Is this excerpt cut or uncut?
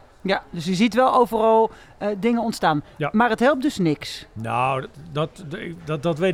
uncut